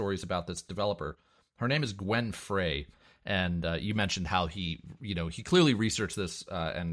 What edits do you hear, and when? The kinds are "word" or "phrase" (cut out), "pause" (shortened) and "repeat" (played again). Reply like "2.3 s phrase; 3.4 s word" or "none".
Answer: none